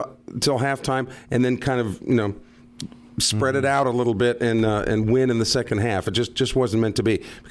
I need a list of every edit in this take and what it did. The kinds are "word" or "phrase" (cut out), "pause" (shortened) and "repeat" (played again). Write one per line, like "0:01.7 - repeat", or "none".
none